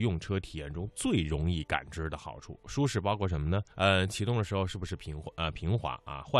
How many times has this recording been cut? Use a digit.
1